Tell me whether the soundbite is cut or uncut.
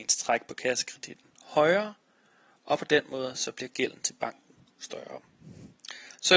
uncut